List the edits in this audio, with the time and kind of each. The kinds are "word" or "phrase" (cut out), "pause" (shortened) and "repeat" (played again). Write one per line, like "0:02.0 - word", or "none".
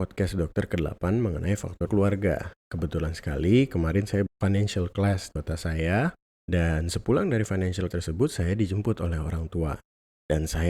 0:01.9 - word
0:04.3 - phrase
0:05.3 - word
0:06.3 - pause
0:07.9 - word